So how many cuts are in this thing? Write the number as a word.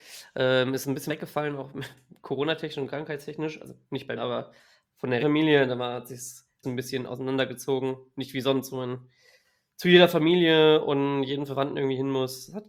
four